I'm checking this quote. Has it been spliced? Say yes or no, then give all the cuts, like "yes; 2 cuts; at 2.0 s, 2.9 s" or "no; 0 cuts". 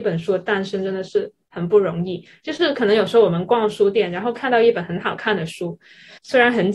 no; 0 cuts